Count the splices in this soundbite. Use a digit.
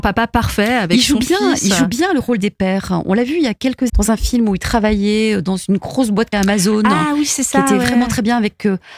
2